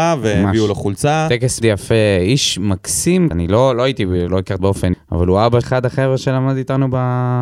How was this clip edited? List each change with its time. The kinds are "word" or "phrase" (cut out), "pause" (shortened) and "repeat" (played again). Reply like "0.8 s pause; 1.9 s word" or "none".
1.6 s word; 3.3 s word; 4.3 s word; 4.6 s word; 4.9 s word; 5.6 s word